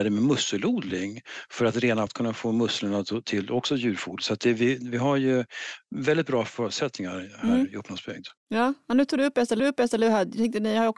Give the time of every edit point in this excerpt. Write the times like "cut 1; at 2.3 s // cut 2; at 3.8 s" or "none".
cut 1; at 2.1 s // cut 2; at 8.4 s // cut 3; at 9.6 s